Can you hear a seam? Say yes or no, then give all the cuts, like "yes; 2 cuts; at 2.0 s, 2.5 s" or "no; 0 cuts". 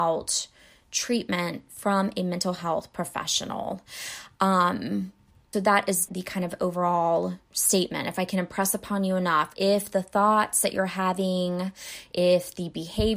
yes; 4 cuts; at 5.5 s, 6.1 s, 7.4 s, 9.5 s